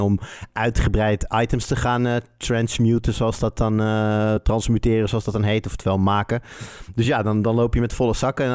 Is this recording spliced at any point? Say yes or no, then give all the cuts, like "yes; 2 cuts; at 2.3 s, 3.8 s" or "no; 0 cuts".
no; 0 cuts